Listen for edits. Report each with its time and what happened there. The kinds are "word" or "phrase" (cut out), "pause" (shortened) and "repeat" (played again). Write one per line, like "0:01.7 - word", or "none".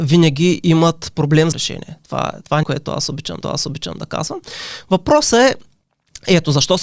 0:01.5 - phrase
0:02.6 - word
0:03.4 - repeat